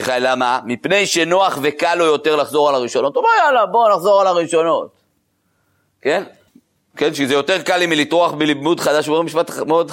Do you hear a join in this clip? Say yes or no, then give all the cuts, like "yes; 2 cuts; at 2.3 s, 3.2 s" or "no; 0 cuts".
yes; 1 cut; at 6.5 s